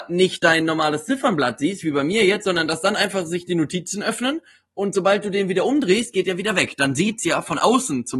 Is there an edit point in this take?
no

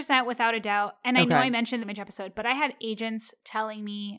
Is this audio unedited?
no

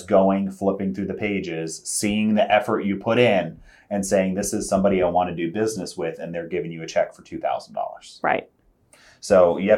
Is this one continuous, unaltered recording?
yes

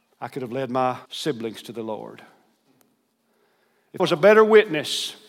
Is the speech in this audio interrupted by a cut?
yes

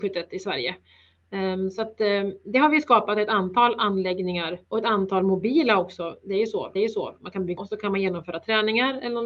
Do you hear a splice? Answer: yes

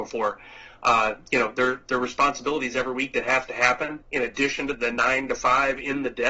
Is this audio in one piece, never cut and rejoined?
no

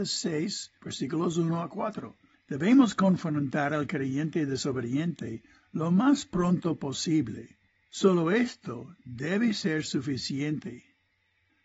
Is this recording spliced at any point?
no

